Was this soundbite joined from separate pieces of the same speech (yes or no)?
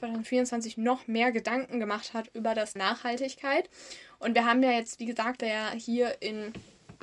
yes